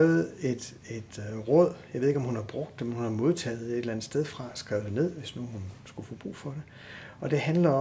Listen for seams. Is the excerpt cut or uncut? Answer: uncut